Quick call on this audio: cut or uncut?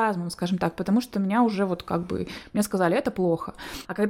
uncut